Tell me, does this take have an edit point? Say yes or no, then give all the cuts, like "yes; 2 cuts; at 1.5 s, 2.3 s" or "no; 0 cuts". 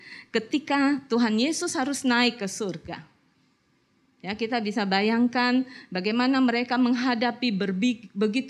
no; 0 cuts